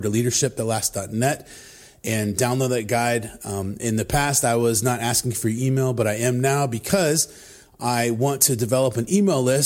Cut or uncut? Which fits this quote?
uncut